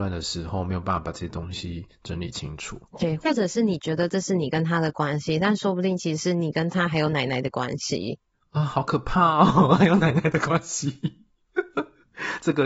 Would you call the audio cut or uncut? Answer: cut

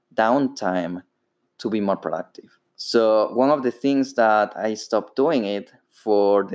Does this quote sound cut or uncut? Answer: cut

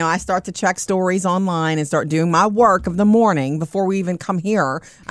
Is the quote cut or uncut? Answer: uncut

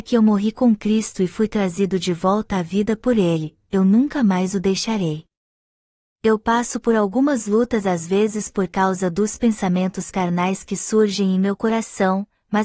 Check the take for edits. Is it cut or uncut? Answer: uncut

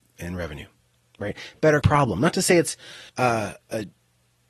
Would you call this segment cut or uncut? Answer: cut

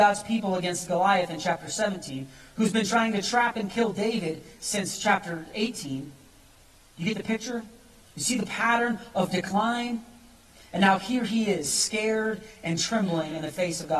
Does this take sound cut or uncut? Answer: uncut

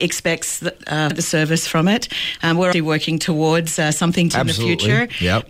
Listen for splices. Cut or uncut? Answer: cut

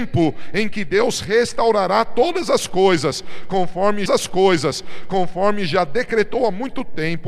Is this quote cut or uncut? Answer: cut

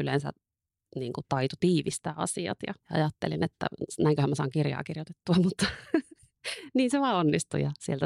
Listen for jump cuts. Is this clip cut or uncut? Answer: cut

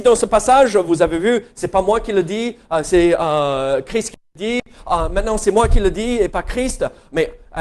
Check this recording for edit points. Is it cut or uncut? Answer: uncut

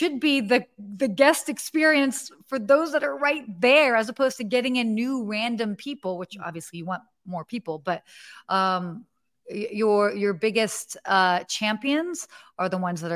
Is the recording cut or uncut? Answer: uncut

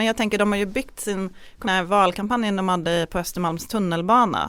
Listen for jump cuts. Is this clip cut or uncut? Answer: cut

